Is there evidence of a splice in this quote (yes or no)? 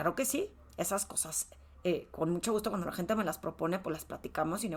no